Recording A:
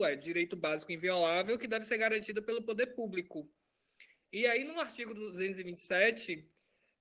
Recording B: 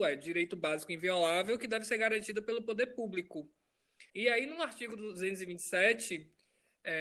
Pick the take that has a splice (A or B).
B